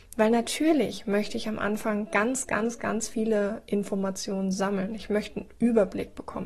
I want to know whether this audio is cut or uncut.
uncut